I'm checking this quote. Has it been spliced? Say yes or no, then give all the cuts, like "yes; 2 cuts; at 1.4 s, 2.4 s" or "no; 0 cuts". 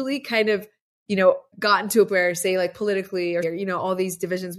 yes; 3 cuts; at 1.5 s, 2.1 s, 3.4 s